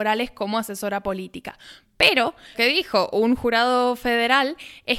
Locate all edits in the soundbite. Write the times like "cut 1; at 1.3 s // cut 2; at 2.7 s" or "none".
cut 1; at 2.5 s

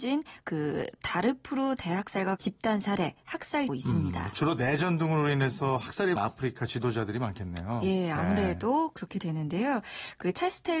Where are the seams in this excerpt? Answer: cut 1; at 2.4 s // cut 2; at 3.7 s // cut 3; at 6.2 s

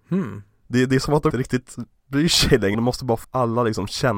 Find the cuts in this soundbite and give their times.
cut 1; at 1.3 s // cut 2; at 2.7 s // cut 3; at 3.2 s

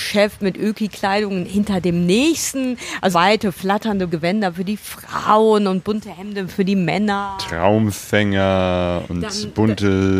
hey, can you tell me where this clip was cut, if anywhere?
cut 1; at 3.1 s // cut 2; at 4.1 s

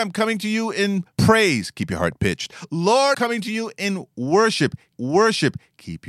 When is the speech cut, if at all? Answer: cut 1; at 1.1 s // cut 2; at 3.1 s // cut 3; at 4.9 s

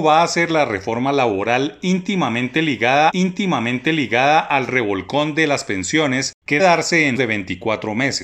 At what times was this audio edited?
cut 1; at 3.1 s // cut 2; at 6.6 s // cut 3; at 7.2 s

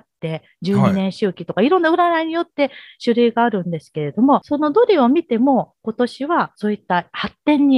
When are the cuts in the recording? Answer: none

